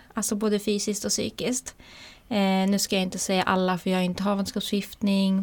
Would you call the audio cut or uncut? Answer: uncut